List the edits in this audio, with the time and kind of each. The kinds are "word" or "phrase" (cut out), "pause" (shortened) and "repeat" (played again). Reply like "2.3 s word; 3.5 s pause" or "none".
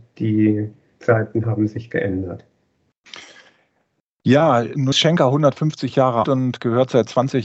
4.9 s word; 6.2 s word